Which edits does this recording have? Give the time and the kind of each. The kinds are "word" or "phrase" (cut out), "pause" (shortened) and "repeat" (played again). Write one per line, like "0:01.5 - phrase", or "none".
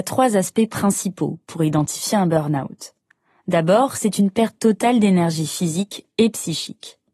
none